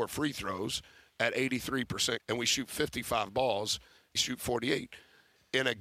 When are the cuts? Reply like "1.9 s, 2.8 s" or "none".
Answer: 2.2 s, 4.2 s